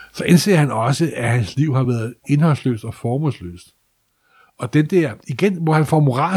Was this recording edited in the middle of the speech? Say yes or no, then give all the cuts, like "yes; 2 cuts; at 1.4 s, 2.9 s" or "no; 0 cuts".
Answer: no; 0 cuts